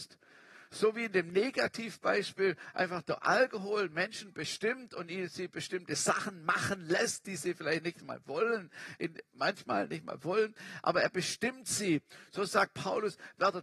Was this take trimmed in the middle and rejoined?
no; 0 cuts

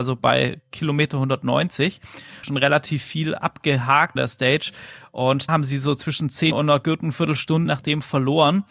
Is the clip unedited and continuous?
no; 5 cuts; at 2.4 s, 4.2 s, 5.5 s, 6.5 s, 7.7 s

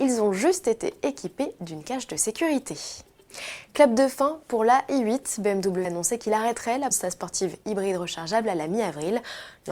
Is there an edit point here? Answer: yes; 2 cuts; at 5.8 s, 6.9 s

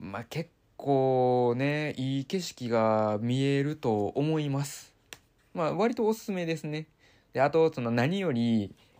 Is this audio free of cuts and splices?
yes; 0 cuts

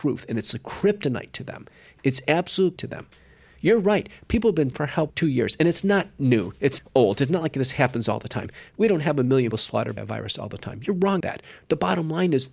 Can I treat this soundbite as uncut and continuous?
no; 7 cuts; at 2.8 s, 4.7 s, 5.1 s, 6.8 s, 9.5 s, 10.0 s, 11.2 s

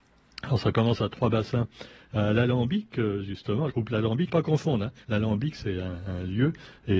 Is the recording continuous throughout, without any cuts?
no; 3 cuts; at 3.7 s, 4.3 s, 5.0 s

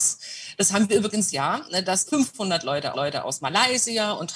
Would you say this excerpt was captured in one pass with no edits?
no; 3 cuts; at 1.3 s, 2.1 s, 2.9 s

